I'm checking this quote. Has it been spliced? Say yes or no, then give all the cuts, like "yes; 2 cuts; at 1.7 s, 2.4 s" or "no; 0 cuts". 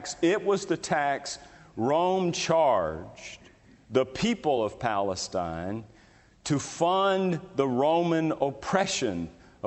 no; 0 cuts